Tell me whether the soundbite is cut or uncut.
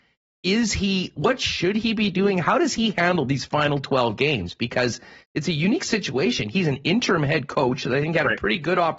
uncut